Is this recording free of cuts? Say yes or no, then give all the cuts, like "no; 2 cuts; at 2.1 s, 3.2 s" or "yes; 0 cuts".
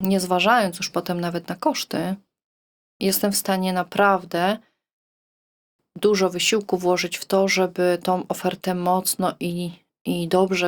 yes; 0 cuts